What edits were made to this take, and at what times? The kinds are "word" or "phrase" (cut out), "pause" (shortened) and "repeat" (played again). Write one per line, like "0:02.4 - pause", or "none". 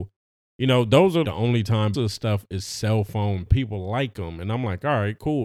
0:01.2 - word
0:01.9 - phrase
0:03.5 - phrase